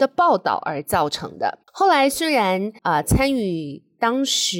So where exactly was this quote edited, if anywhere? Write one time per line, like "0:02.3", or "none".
0:01.6
0:02.8

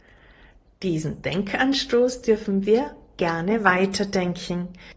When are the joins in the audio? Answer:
none

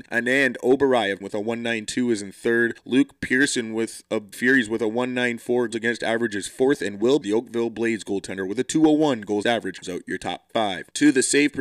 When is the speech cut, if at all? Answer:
0:01.2
0:04.3
0:05.7
0:07.2
0:09.4
0:09.8

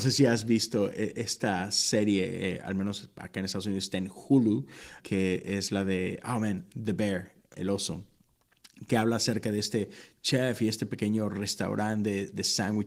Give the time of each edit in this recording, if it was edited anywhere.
0:05.0
0:07.5

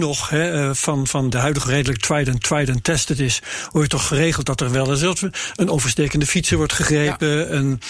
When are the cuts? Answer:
0:01.3
0:01.6
0:02.4

